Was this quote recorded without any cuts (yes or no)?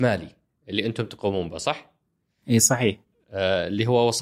yes